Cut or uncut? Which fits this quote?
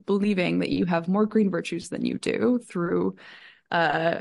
uncut